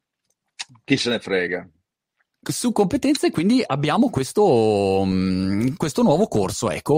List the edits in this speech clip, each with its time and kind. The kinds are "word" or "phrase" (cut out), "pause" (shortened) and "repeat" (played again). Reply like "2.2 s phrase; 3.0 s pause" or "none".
none